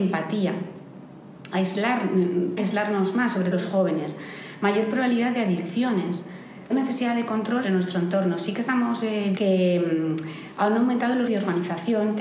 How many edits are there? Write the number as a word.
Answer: six